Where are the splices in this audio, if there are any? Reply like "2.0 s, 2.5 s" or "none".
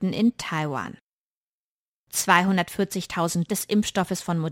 3.5 s